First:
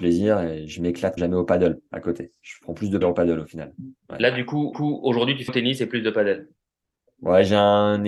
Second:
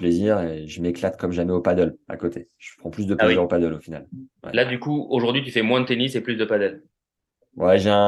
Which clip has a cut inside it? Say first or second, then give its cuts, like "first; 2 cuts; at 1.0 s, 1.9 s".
first; 4 cuts; at 1.2 s, 3.0 s, 4.7 s, 5.5 s